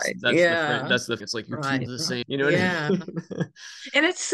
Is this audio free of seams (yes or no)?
no